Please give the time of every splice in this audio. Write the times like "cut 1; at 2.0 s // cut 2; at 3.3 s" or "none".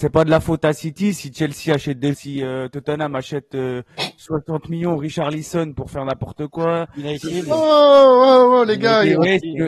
cut 1; at 2.1 s